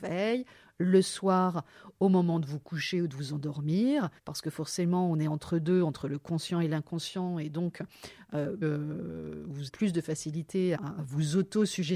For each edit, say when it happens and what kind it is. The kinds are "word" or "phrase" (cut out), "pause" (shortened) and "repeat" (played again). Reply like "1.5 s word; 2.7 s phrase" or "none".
4.2 s pause; 8.6 s phrase; 9.7 s word; 10.8 s word